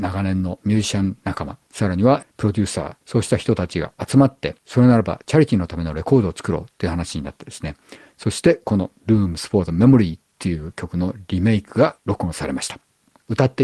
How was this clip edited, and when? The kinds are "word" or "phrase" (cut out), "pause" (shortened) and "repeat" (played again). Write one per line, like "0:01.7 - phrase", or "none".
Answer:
0:03.0 - pause
0:04.6 - pause
0:12.0 - pause